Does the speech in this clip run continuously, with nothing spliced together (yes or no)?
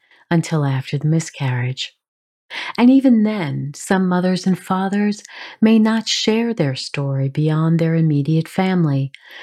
yes